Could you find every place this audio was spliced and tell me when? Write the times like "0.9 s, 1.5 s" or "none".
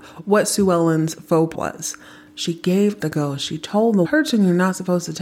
1.5 s, 3.0 s, 4.0 s